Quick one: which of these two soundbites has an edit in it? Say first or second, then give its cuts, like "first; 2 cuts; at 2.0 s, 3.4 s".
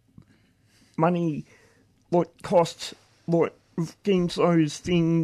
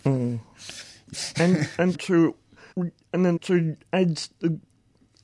second; 4 cuts; at 1.1 s, 1.9 s, 2.7 s, 3.4 s